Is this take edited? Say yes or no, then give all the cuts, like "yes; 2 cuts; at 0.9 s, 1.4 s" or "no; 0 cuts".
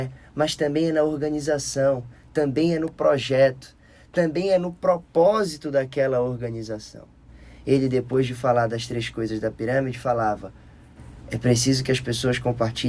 no; 0 cuts